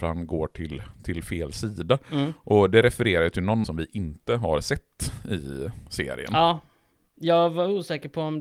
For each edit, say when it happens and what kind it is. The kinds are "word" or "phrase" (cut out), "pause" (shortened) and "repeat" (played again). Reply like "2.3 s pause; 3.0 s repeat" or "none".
3.6 s phrase